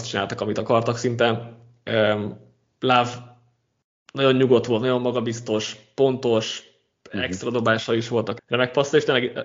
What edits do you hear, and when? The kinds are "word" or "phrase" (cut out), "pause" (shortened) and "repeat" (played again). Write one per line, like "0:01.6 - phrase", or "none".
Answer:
0:08.4 - word